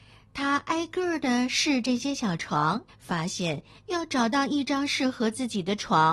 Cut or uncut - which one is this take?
cut